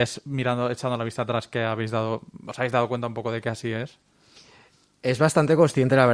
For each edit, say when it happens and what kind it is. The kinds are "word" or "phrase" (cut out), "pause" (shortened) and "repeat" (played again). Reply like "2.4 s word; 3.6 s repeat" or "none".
none